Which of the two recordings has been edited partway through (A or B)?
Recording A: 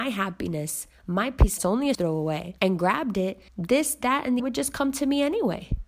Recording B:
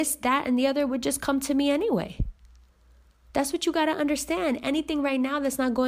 A